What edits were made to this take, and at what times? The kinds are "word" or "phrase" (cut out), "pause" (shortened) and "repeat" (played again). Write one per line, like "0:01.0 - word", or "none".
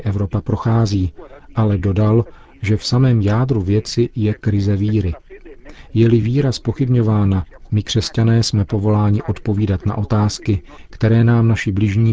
none